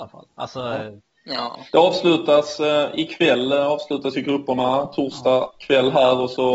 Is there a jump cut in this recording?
yes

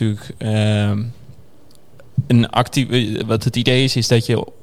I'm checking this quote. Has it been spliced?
no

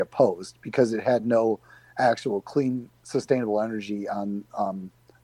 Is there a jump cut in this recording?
no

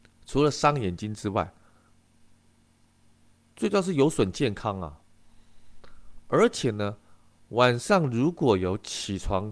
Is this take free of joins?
yes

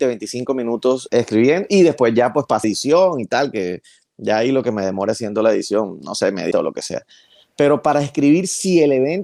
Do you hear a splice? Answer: yes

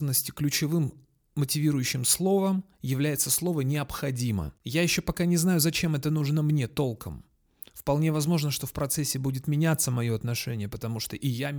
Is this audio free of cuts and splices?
yes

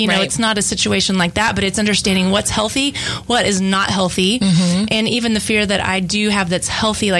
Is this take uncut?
yes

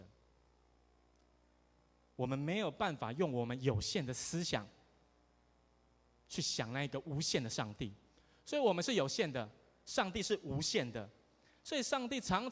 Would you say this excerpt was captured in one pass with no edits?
yes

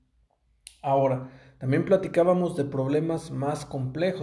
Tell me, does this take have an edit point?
no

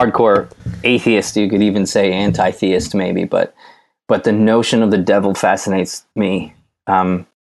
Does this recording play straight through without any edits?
no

